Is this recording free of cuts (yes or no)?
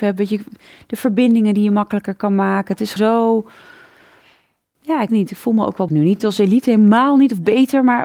no